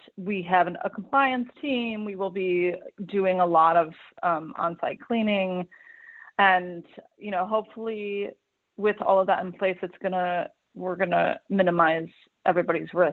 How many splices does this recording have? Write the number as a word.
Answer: zero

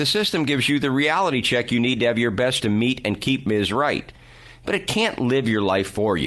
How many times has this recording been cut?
one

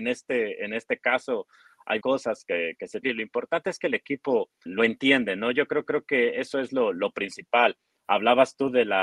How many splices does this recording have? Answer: four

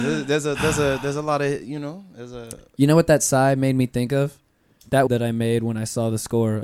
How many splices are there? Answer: one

